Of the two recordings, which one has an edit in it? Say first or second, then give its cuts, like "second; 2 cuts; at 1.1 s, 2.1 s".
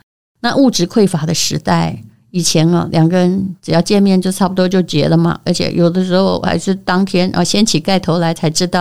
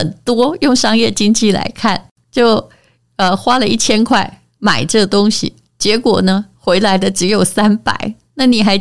second; 1 cut; at 2.1 s